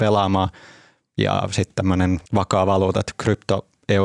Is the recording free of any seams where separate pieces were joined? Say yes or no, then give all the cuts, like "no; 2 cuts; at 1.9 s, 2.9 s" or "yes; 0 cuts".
no; 1 cut; at 2.3 s